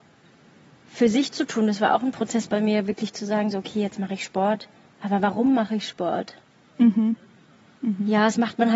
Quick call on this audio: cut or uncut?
cut